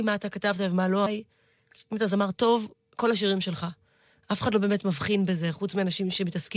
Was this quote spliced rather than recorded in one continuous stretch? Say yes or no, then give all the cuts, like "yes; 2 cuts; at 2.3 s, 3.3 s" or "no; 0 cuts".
yes; 1 cut; at 1.1 s